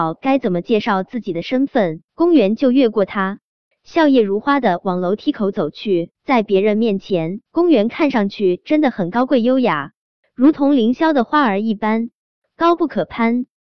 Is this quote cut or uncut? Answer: cut